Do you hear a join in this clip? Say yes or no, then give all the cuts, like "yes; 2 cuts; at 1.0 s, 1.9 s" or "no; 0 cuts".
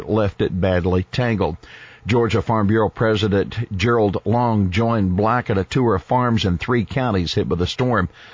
no; 0 cuts